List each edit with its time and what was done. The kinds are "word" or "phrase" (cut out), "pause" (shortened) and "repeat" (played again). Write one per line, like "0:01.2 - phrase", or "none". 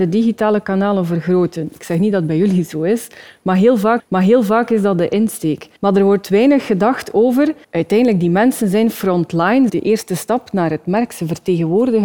0:04.0 - repeat
0:05.8 - pause
0:07.6 - pause
0:09.7 - phrase